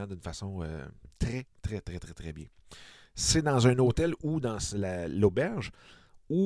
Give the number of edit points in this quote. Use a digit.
1